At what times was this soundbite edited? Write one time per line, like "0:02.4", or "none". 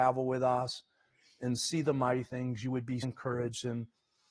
0:03.0